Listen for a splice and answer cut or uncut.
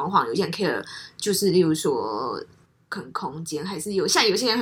uncut